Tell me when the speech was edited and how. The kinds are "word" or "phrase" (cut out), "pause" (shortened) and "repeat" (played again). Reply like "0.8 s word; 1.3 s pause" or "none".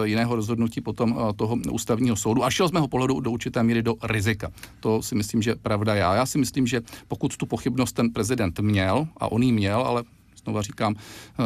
none